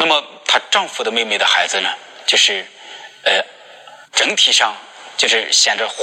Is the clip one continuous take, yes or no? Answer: no